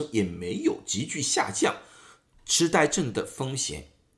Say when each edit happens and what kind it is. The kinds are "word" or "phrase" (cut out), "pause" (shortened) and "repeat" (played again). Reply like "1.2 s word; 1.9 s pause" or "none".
none